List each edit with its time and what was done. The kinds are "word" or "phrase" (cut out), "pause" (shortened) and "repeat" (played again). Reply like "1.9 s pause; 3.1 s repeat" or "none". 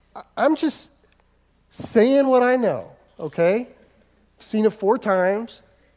none